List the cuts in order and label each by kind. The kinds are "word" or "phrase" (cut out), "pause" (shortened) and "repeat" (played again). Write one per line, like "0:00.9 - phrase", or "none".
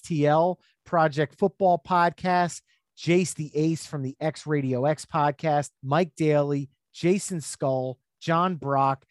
0:05.8 - pause